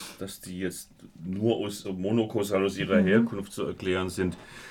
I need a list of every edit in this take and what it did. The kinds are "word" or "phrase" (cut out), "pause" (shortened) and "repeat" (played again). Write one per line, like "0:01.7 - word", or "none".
0:01.8 - word